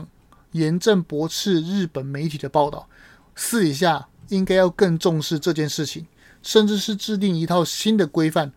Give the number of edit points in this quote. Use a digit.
0